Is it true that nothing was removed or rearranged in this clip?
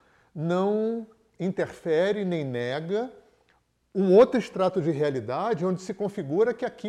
yes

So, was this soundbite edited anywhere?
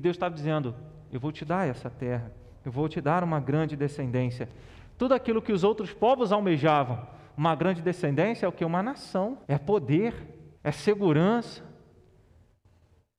yes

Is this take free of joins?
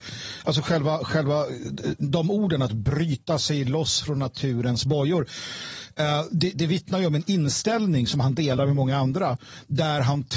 yes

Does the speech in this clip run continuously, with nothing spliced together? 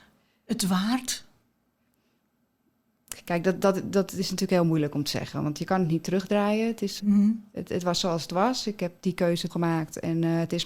no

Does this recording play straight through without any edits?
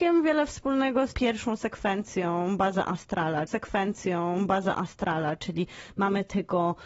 no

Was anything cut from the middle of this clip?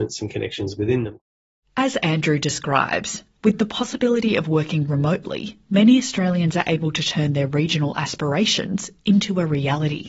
no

